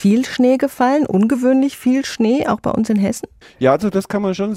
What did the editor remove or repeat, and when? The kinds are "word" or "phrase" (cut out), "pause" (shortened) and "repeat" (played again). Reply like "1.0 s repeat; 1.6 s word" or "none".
3.4 s pause